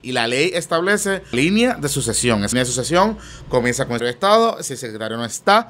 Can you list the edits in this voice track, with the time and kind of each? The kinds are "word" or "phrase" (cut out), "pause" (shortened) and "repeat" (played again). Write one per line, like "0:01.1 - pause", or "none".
0:01.3 - word
0:02.5 - word
0:04.0 - word